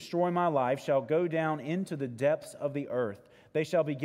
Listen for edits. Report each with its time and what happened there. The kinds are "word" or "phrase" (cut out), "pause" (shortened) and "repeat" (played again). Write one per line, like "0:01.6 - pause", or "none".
none